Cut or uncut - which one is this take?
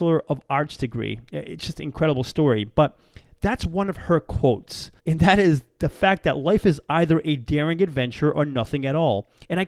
cut